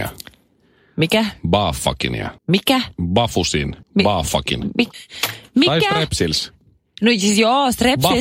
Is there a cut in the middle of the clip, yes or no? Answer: yes